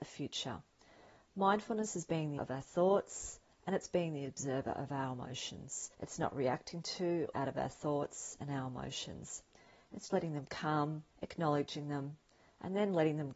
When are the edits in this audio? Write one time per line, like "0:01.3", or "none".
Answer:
0:02.4
0:05.9
0:07.3
0:10.1
0:11.1